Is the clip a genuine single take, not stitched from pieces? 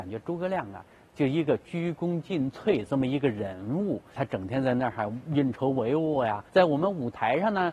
no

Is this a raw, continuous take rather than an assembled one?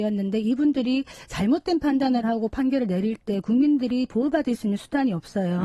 yes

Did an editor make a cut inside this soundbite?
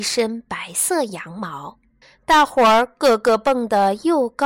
yes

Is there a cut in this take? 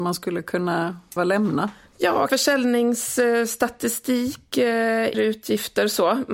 yes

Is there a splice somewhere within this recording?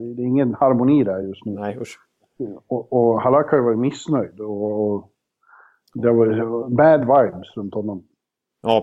no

